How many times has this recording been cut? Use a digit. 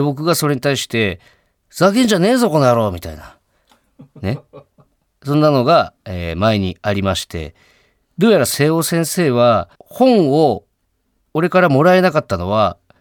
1